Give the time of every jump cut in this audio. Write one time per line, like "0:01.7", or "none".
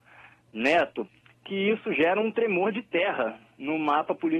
none